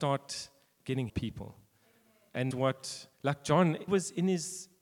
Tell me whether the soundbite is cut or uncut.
cut